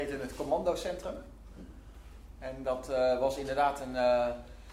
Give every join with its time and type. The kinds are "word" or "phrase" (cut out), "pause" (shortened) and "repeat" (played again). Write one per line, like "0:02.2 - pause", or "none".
none